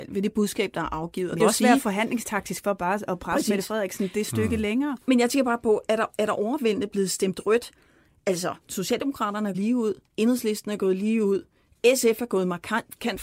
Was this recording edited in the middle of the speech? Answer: yes; 4 cuts; at 1.4 s, 8.6 s, 9.5 s, 10.1 s

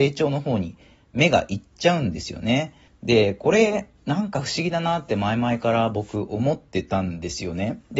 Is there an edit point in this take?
yes; 1 cut; at 2.9 s

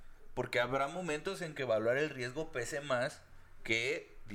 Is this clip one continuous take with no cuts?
yes; 0 cuts

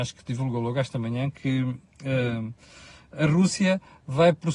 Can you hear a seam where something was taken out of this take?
no; 0 cuts

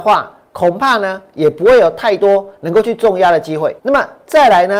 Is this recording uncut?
no; 1 cut; at 3.8 s

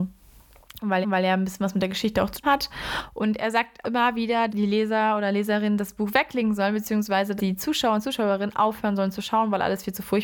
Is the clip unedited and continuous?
no; 5 cuts; at 1.0 s, 2.4 s, 3.8 s, 4.5 s, 7.4 s

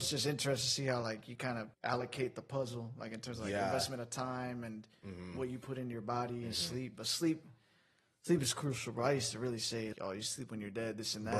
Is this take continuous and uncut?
no; 2 cuts; at 1.7 s, 9.9 s

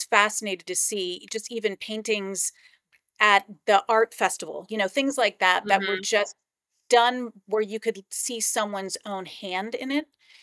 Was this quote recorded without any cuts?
yes; 0 cuts

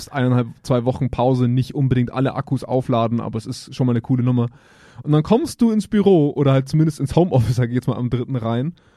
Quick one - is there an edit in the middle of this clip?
no; 0 cuts

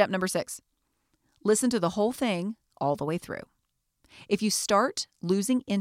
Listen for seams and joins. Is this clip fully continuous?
yes; 0 cuts

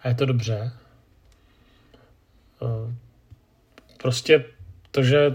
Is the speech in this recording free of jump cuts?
yes; 0 cuts

